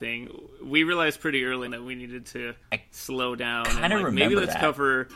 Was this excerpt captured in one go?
no; 2 cuts; at 1.7 s, 2.6 s

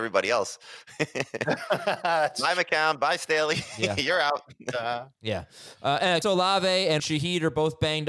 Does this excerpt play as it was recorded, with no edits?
no; 2 cuts; at 6.2 s, 7.0 s

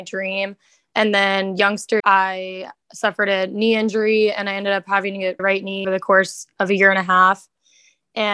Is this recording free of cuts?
no; 3 cuts; at 2.0 s, 5.4 s, 5.8 s

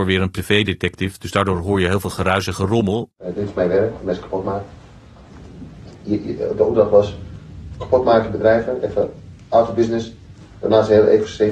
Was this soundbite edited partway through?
yes; 1 cut; at 3.2 s

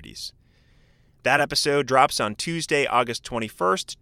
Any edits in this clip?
no; 0 cuts

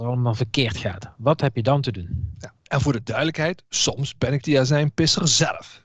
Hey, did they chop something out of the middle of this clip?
no; 0 cuts

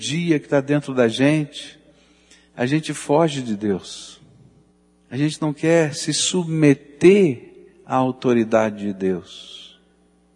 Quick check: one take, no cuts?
yes; 0 cuts

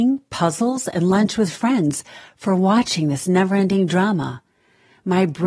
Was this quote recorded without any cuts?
yes; 0 cuts

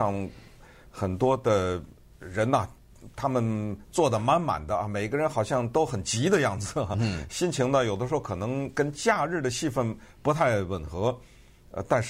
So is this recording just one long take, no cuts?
yes; 0 cuts

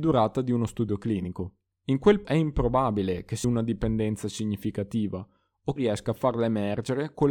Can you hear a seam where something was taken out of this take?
yes; 4 cuts; at 1.7 s, 2.2 s, 3.4 s, 5.8 s

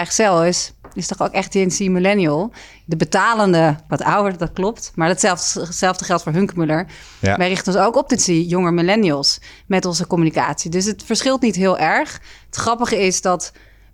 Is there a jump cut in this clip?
yes; 2 cuts; at 3.9 s, 8.2 s

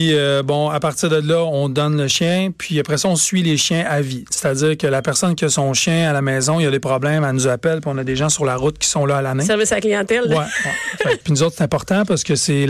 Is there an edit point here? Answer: yes; 1 cut; at 11.2 s

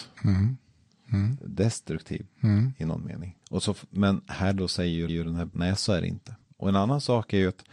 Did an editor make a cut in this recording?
yes; 3 cuts; at 3.4 s, 5.1 s, 5.5 s

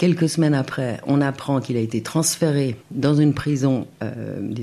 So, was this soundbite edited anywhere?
yes; 1 cut; at 2.8 s

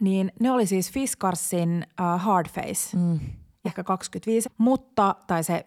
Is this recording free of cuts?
no; 2 cuts; at 3.6 s, 4.4 s

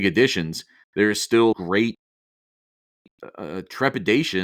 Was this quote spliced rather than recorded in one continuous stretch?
yes; 1 cut; at 1.5 s

